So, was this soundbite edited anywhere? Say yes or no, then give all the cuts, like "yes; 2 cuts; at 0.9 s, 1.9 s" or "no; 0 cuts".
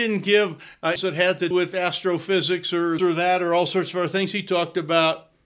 yes; 3 cuts; at 1.0 s, 1.5 s, 3.0 s